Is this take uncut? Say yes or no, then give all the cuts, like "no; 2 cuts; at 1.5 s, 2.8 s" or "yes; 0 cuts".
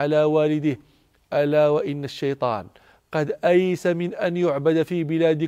yes; 0 cuts